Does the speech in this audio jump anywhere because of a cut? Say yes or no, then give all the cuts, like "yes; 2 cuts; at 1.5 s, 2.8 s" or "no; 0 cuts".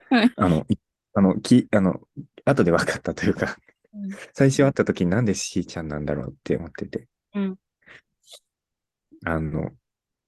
no; 0 cuts